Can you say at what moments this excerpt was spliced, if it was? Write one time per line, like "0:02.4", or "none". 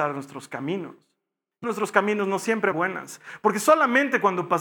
0:01.6
0:02.7